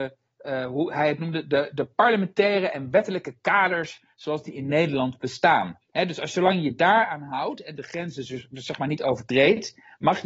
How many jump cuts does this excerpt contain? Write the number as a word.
one